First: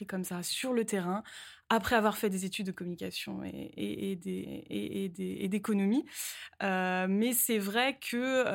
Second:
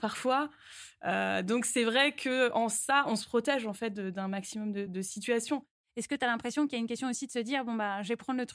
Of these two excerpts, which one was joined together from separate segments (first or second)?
first